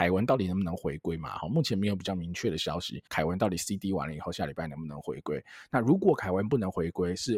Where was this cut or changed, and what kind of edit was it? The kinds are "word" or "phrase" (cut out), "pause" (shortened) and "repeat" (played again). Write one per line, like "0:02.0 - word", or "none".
0:03.1 - pause